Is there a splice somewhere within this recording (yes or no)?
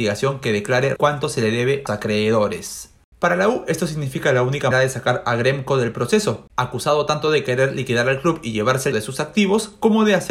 yes